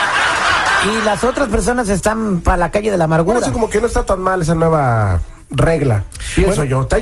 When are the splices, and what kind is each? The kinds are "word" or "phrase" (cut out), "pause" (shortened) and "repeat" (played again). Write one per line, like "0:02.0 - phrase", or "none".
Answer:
0:03.5 - word
0:04.4 - word